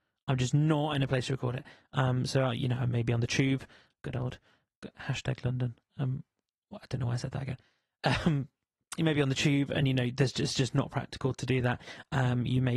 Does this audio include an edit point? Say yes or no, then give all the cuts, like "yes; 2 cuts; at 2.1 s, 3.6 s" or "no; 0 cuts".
no; 0 cuts